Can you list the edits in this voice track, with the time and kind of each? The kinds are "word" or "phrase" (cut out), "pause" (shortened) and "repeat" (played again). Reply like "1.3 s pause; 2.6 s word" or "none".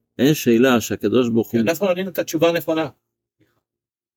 none